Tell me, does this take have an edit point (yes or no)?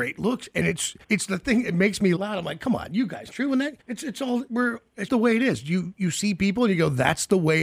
yes